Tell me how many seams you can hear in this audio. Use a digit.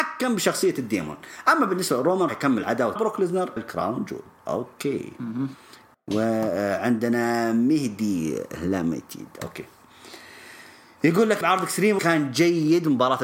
6